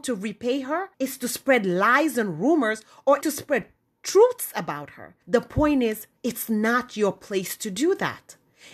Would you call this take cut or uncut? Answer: cut